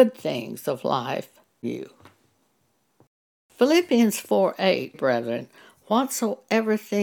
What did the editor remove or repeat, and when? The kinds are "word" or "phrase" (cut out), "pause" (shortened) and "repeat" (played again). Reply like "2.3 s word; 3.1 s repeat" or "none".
1.6 s phrase; 4.9 s word